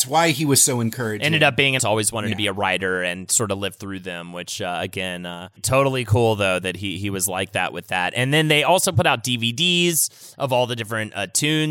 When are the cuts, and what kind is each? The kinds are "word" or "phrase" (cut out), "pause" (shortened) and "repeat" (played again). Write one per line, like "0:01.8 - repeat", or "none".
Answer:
0:01.8 - word
0:05.6 - word